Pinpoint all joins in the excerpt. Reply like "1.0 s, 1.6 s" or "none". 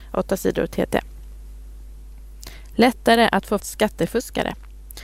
3.6 s

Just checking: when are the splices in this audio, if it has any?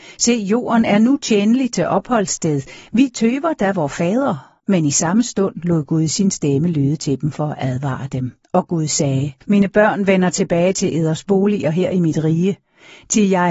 4.6 s, 8.4 s, 9.4 s

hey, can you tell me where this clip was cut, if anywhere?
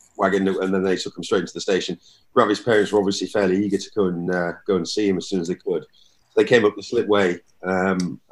none

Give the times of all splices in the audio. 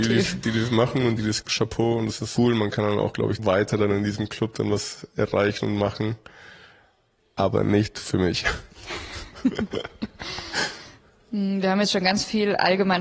1.4 s, 2.4 s, 3.4 s

